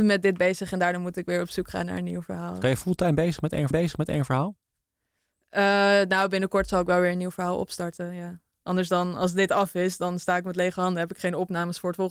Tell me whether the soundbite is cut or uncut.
cut